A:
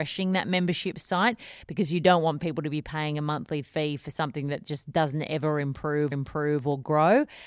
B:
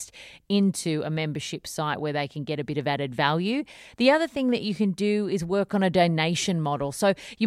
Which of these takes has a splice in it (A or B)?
A